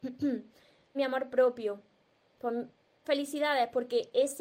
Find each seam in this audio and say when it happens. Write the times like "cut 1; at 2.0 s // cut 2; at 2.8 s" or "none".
cut 1; at 0.9 s // cut 2; at 3.0 s